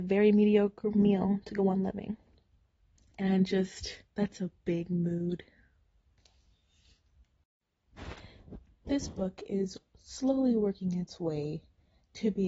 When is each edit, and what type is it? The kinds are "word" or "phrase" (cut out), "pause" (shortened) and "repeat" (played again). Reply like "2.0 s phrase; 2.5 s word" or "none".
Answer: 4.1 s pause